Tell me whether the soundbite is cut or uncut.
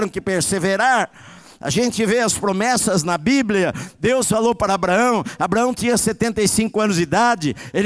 uncut